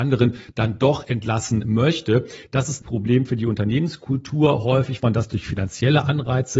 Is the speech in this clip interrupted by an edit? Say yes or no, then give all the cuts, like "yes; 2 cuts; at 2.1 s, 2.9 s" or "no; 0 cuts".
yes; 2 cuts; at 2.8 s, 5.0 s